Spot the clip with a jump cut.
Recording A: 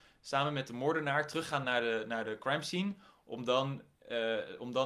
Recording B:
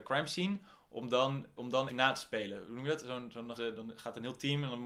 B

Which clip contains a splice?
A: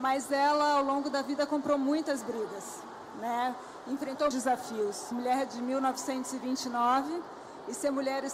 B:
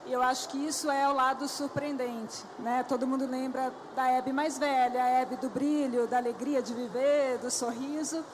A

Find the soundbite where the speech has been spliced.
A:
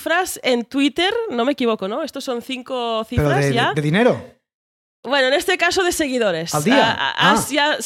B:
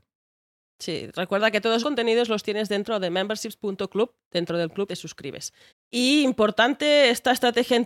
B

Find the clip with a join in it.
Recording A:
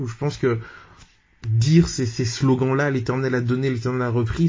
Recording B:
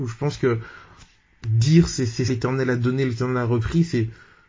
B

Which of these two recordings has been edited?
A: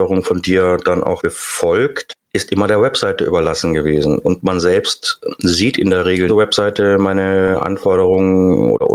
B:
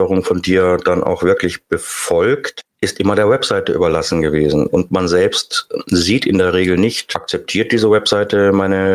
A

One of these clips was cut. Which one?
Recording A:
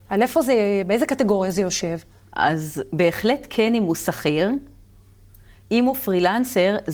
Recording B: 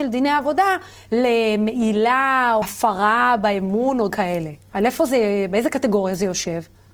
B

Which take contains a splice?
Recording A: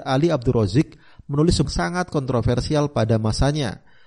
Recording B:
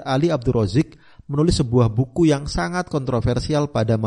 A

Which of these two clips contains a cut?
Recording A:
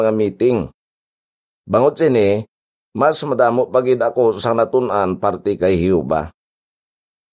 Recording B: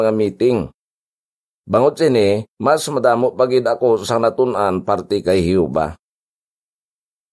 B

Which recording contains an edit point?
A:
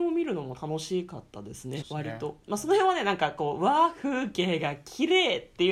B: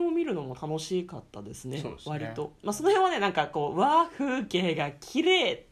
A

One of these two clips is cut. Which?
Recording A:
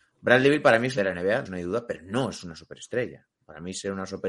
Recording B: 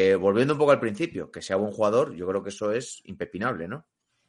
A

